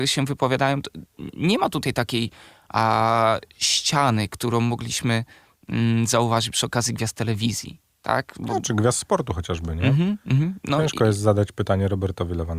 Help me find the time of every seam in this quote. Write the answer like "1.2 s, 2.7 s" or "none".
none